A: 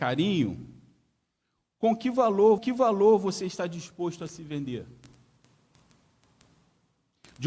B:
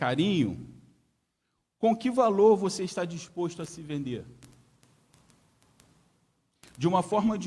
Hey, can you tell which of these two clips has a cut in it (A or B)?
A